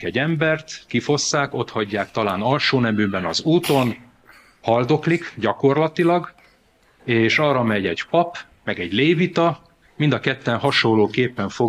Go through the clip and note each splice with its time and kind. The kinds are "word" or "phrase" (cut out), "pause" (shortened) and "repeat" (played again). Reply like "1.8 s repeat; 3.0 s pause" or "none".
none